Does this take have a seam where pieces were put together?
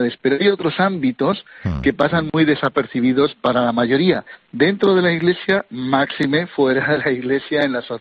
no; 0 cuts

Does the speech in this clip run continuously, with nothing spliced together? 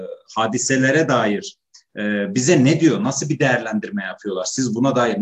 yes; 0 cuts

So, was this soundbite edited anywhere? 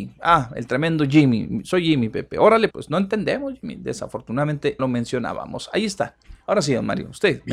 yes; 2 cuts; at 2.7 s, 4.8 s

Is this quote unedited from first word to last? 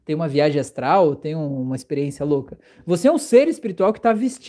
yes; 0 cuts

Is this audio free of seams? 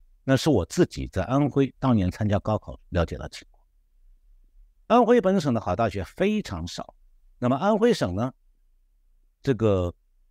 yes; 0 cuts

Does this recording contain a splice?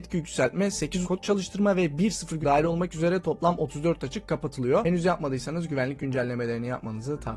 yes; 2 cuts; at 1.0 s, 2.4 s

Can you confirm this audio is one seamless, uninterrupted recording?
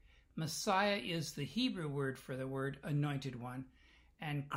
yes; 0 cuts

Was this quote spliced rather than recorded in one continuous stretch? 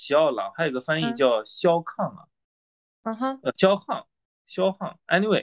no; 0 cuts

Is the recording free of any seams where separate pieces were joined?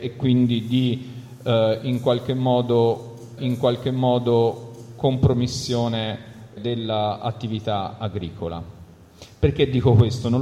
no; 2 cuts; at 3.4 s, 6.6 s

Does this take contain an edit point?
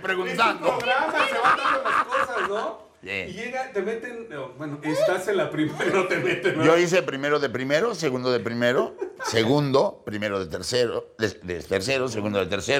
no; 0 cuts

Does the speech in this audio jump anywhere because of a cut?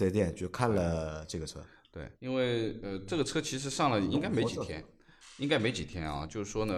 yes; 1 cut; at 2.1 s

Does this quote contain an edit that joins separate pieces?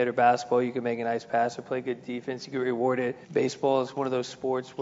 yes; 1 cut; at 3.2 s

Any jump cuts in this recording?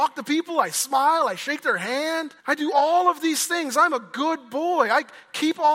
yes; 1 cut; at 2.4 s

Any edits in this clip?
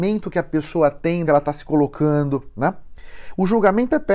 yes; 1 cut; at 1.3 s

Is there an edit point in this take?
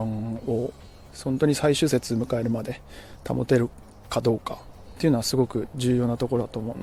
no; 0 cuts

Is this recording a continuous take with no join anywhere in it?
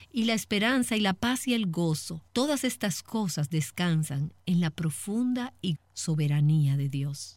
no; 2 cuts; at 2.3 s, 5.8 s

